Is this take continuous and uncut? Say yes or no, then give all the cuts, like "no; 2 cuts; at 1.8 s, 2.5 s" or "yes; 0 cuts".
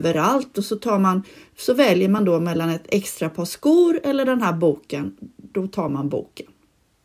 yes; 0 cuts